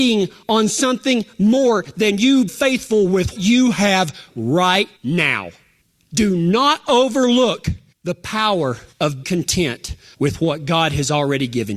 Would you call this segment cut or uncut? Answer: cut